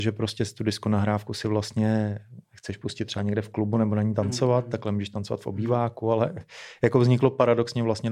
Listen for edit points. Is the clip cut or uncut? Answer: uncut